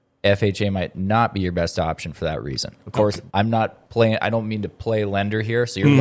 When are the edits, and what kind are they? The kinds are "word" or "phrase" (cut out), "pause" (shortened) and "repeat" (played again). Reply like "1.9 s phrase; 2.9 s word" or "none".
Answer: 3.3 s pause